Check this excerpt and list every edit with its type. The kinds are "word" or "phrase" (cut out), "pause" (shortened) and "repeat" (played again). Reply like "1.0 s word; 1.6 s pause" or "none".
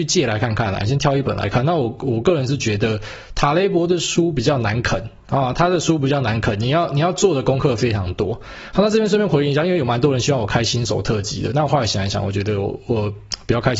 5.2 s pause